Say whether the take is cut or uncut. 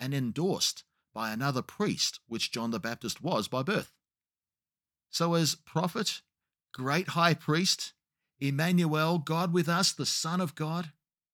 uncut